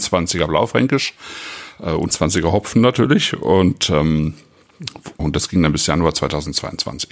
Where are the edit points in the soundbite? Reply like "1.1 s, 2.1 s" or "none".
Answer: 2.1 s, 5.2 s